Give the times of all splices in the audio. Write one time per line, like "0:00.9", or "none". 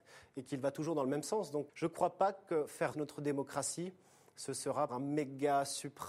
0:01.7
0:02.9
0:04.9